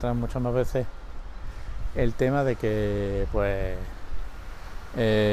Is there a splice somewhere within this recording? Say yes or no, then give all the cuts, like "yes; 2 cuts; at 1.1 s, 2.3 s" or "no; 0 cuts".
no; 0 cuts